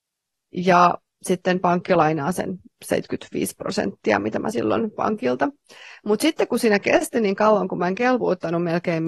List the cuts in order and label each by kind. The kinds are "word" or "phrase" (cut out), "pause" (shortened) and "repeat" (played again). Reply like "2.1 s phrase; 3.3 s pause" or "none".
4.5 s word